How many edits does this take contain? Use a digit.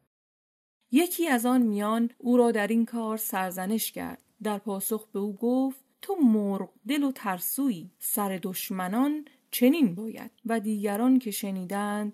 5